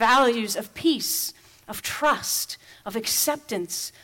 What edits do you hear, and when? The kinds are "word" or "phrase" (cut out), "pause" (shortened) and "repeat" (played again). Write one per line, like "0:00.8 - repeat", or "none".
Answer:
none